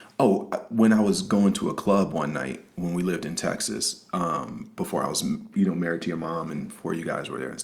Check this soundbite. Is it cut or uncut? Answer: uncut